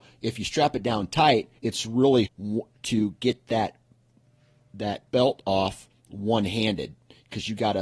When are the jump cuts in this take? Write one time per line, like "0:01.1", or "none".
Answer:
0:01.6
0:02.3
0:05.1

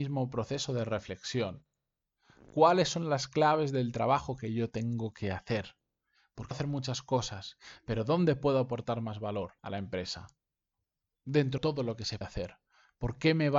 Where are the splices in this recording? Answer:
0:06.5
0:09.6
0:11.6
0:12.2

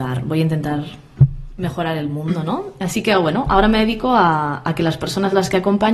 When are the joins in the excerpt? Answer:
none

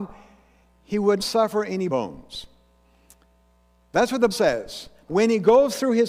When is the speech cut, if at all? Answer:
0:01.2
0:01.9
0:04.3
0:05.1

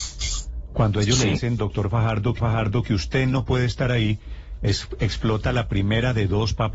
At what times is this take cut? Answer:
0:02.4

